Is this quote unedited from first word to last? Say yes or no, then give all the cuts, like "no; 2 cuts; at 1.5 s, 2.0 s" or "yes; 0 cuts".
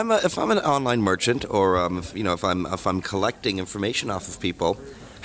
yes; 0 cuts